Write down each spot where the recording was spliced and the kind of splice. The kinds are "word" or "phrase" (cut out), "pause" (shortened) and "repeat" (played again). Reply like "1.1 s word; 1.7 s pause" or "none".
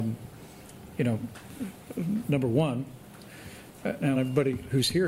4.1 s word